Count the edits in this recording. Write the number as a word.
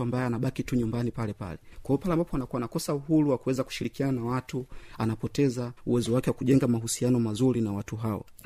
one